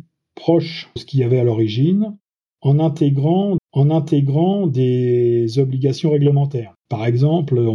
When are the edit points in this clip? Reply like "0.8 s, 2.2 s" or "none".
1.0 s, 3.6 s, 6.8 s